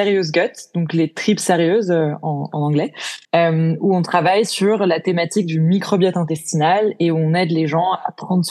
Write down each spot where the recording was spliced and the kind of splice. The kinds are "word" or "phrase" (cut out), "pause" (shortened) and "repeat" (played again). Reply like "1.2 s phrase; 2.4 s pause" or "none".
3.2 s pause